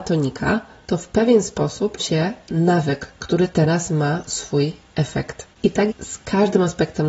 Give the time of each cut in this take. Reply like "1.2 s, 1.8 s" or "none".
2.0 s, 5.5 s, 5.9 s